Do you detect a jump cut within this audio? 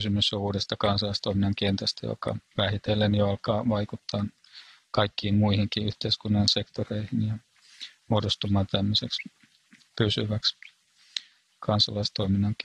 yes; 1 cut; at 2.5 s

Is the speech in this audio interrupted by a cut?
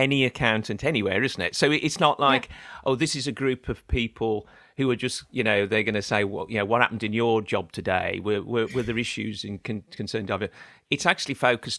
no; 0 cuts

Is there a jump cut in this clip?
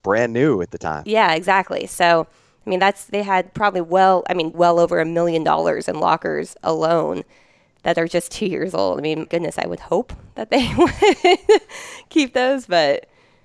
yes; 2 cuts; at 4.5 s, 9.2 s

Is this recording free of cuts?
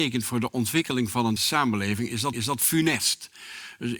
no; 2 cuts; at 1.4 s, 2.3 s

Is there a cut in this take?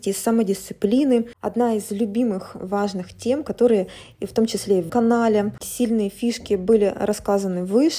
yes; 2 cuts; at 4.9 s, 5.6 s

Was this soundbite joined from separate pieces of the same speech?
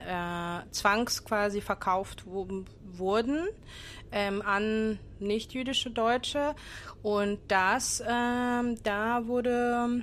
no; 0 cuts

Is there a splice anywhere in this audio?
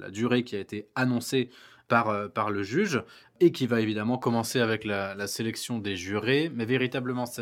no; 0 cuts

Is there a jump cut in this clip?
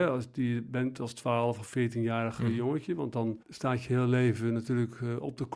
yes; 1 cut; at 3.4 s

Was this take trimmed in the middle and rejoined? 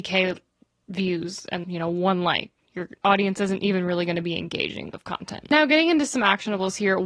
yes; 2 cuts; at 1.6 s, 4.9 s

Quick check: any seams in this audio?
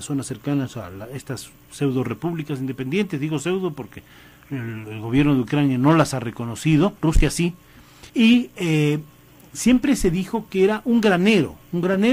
yes; 2 cuts; at 7.0 s, 8.1 s

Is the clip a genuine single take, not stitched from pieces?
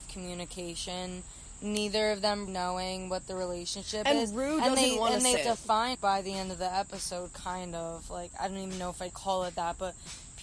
no; 4 cuts; at 2.5 s, 5.4 s, 5.9 s, 9.1 s

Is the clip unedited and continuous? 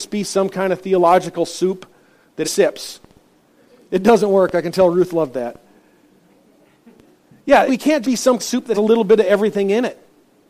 no; 5 cuts; at 2.4 s, 7.7 s, 8.0 s, 8.4 s, 8.7 s

